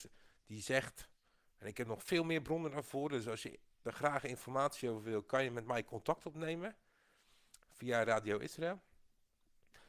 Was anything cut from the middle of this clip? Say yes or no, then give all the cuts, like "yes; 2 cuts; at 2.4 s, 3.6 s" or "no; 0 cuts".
no; 0 cuts